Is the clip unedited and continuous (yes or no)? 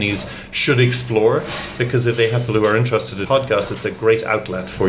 no